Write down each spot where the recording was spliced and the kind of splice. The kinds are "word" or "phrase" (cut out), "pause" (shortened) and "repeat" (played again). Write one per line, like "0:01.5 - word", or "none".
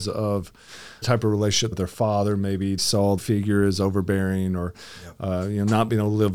0:01.0 - word
0:01.7 - phrase
0:02.8 - word
0:03.2 - phrase